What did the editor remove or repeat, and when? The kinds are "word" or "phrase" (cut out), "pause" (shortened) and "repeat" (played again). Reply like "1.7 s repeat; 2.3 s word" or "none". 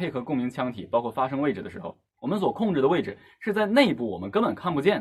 2.1 s pause

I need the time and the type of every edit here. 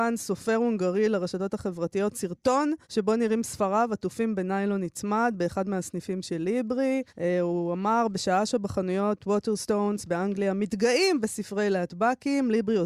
2.8 s pause; 7.1 s pause

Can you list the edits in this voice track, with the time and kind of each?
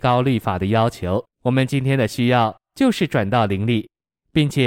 1.3 s pause

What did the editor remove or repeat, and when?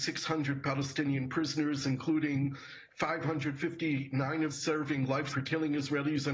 4.5 s word; 5.3 s word

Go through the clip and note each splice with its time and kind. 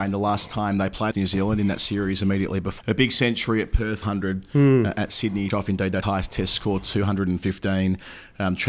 1.1 s word; 2.8 s phrase; 4.0 s phrase; 5.5 s phrase; 6.0 s word

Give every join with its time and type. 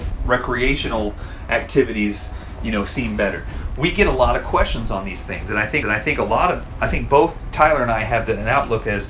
5.8 s repeat

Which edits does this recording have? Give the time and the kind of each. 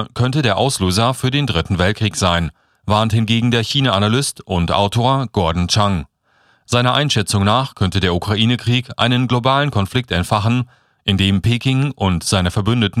none

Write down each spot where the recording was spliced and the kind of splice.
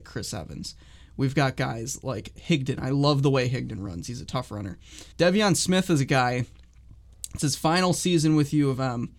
5.1 s pause

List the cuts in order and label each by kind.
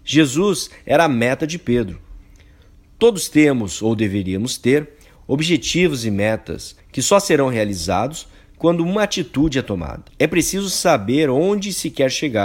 6.8 s pause; 10.1 s pause

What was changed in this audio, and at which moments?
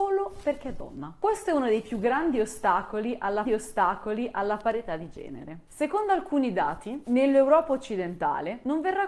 3.4 s repeat; 7.0 s phrase

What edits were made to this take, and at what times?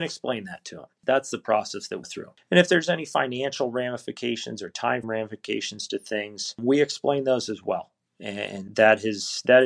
2.0 s phrase; 5.0 s word; 8.7 s word

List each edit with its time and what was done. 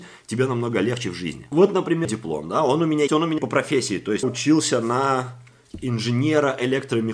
2.0 s word; 3.1 s word; 3.4 s word; 4.2 s word

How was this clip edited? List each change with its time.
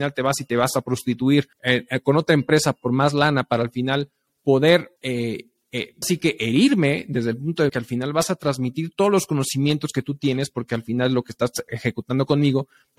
1.5 s pause; 5.0 s pause; 6.0 s word; 7.7 s word; 11.7 s word

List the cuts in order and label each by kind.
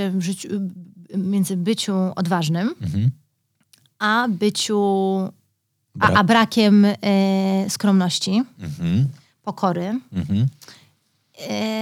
none

